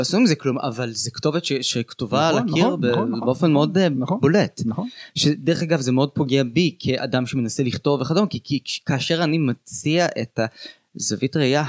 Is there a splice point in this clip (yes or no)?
no